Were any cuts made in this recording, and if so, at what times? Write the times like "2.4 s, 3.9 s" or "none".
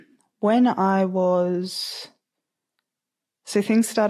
none

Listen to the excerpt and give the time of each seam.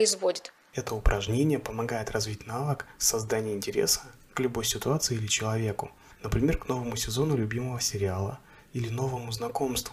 none

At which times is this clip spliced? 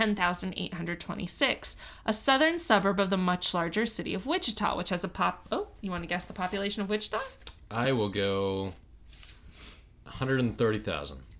none

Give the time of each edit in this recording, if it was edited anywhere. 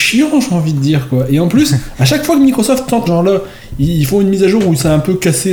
3.0 s

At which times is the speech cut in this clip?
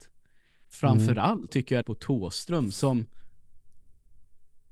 1.5 s, 1.8 s

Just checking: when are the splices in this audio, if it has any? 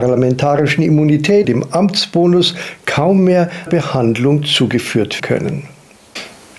1.4 s, 3.7 s, 5.2 s

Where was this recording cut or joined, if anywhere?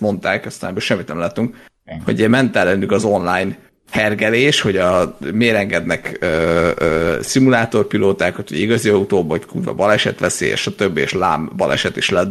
none

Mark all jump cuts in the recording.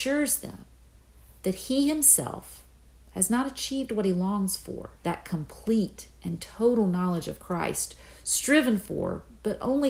5.0 s

